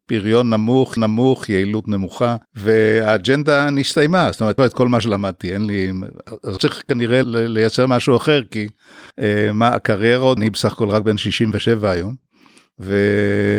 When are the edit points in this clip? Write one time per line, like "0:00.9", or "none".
0:01.0
0:02.4
0:04.6
0:06.6
0:07.2
0:09.1
0:10.4